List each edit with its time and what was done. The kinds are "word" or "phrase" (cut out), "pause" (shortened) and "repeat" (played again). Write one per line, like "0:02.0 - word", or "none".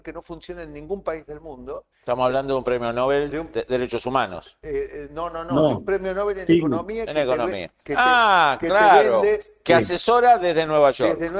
0:01.9 - pause